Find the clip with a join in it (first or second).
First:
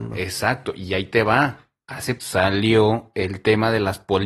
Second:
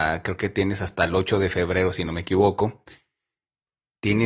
first